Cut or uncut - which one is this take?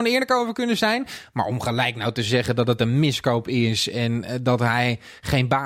uncut